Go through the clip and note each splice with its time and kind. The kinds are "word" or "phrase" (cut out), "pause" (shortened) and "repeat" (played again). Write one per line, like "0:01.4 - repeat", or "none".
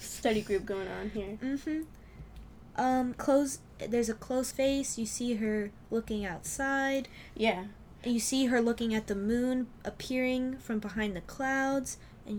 0:03.2 - phrase
0:04.5 - phrase